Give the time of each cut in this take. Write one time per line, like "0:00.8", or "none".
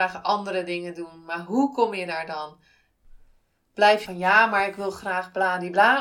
0:04.1